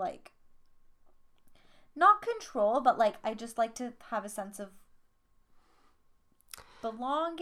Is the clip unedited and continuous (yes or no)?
yes